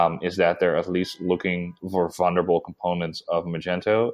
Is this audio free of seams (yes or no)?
no